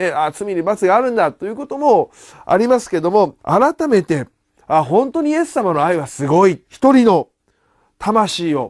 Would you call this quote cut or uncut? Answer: cut